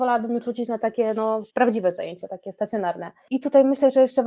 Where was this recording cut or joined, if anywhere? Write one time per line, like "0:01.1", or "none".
0:01.5

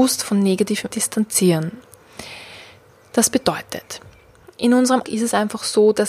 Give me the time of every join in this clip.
0:00.9
0:05.0

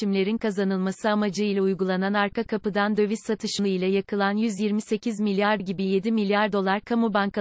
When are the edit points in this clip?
0:03.6
0:05.6

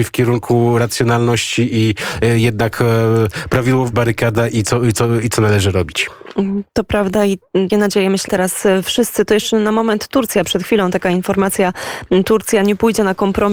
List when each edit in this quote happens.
0:03.9
0:06.7
0:07.7
0:08.3

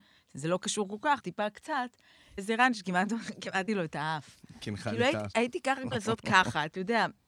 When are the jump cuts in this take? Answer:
0:01.2
0:02.4
0:03.7
0:05.3
0:05.9

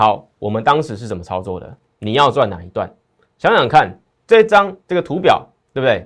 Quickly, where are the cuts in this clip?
0:04.8

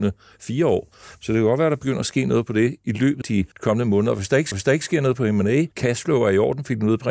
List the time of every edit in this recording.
0:03.2
0:03.5
0:04.5
0:05.7

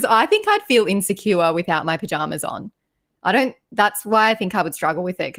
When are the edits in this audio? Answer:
none

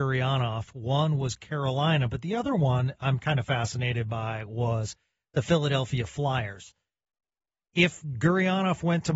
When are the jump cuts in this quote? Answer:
none

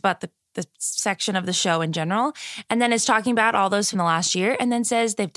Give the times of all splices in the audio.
0:03.9

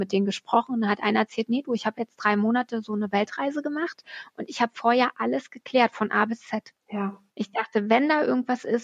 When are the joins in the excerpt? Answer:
0:07.3

